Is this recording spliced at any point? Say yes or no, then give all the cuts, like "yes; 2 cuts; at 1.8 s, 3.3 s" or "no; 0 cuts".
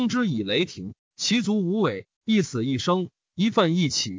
yes; 1 cut; at 2.2 s